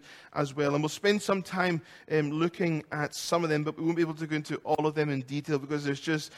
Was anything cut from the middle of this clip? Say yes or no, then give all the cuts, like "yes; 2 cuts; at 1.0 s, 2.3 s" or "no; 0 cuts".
no; 0 cuts